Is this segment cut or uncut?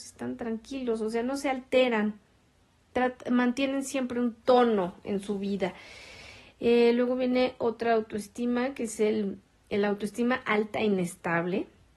uncut